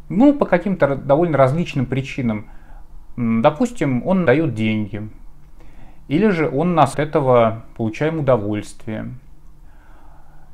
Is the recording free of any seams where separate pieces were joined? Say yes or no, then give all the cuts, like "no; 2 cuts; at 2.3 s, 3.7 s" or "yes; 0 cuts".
no; 2 cuts; at 4.2 s, 6.9 s